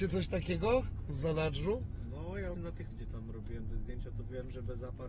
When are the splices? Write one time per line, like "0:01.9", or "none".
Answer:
0:02.5
0:02.9